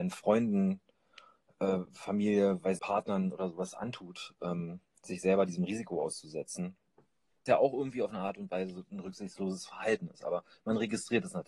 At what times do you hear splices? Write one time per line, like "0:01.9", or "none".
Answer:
0:02.8
0:07.5

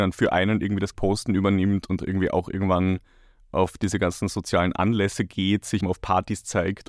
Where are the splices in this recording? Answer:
0:00.9
0:02.0
0:05.8

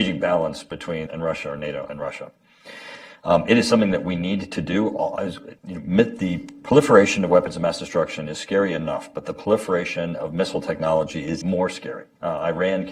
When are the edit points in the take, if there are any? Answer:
0:01.1
0:05.6
0:11.4

